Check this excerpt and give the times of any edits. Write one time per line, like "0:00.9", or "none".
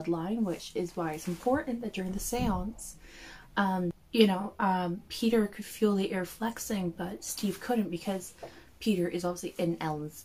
none